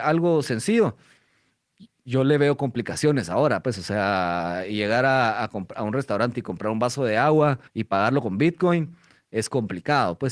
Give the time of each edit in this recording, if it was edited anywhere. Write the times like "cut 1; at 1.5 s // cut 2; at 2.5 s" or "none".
cut 1; at 7.7 s